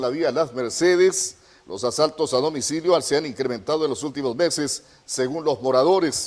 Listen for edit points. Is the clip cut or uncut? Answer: uncut